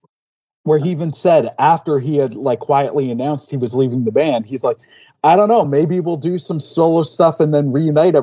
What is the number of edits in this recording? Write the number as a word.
zero